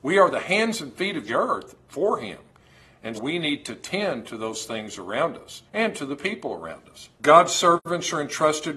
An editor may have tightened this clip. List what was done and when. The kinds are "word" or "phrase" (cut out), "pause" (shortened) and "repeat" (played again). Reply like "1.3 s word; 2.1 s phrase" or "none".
1.3 s phrase; 3.1 s word; 5.7 s pause; 7.1 s pause